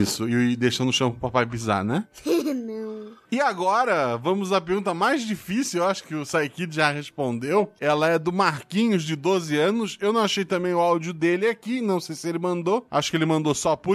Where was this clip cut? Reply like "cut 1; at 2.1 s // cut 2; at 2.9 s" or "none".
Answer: cut 1; at 6.0 s